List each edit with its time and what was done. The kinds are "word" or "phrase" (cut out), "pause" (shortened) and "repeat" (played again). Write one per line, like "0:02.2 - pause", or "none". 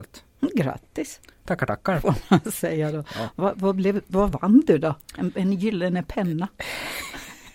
none